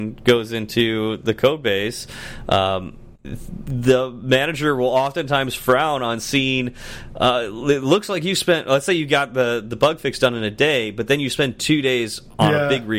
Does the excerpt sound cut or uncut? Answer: cut